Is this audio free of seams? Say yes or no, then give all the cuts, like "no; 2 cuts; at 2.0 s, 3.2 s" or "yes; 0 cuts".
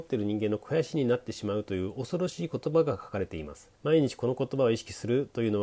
no; 1 cut; at 3.8 s